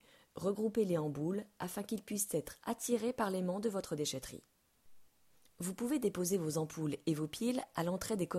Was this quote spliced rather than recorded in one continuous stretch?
no; 0 cuts

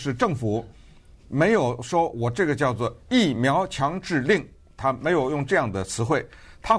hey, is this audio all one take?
yes; 0 cuts

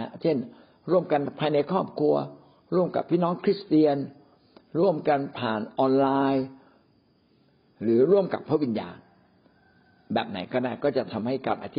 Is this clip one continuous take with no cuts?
yes; 0 cuts

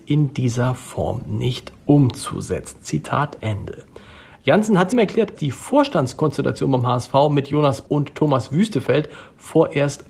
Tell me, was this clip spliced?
yes; 3 cuts; at 4.9 s, 5.3 s, 7.9 s

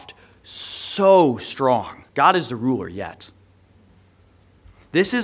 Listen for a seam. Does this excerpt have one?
yes; 1 cut; at 2.1 s

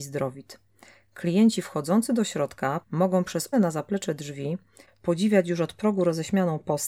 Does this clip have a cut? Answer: yes; 2 cuts; at 2.8 s, 3.5 s

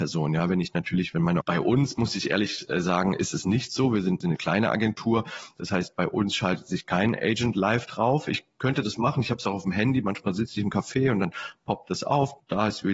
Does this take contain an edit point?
yes; 1 cut; at 1.4 s

